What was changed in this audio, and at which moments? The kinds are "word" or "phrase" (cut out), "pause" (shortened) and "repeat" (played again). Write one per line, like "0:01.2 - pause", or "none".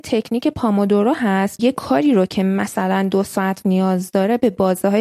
0:01.6 - word
0:03.6 - word